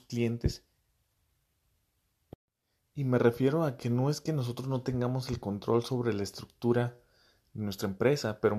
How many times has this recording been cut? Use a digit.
0